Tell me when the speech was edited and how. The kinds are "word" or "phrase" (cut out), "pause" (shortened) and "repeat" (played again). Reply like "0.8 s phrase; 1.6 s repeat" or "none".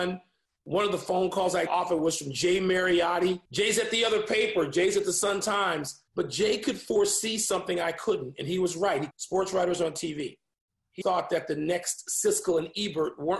1.7 s word; 3.4 s pause; 6.1 s pause; 9.1 s phrase; 11.0 s word